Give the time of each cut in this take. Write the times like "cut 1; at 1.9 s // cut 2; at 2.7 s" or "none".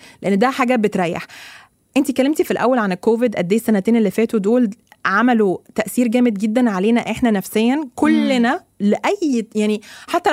none